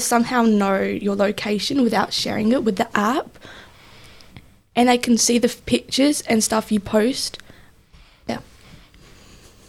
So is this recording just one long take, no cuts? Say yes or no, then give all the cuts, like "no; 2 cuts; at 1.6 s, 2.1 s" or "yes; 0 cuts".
yes; 0 cuts